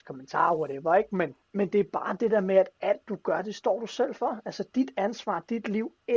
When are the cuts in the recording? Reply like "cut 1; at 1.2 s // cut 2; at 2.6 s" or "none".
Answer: cut 1; at 1.4 s